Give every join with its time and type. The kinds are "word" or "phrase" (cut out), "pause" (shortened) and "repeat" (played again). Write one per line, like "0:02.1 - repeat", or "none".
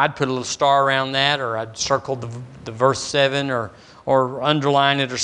none